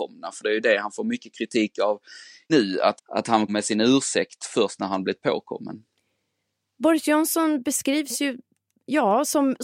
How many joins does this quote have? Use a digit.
3